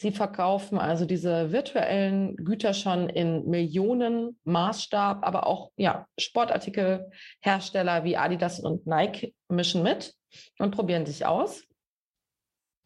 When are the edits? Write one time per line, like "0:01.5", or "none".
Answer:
none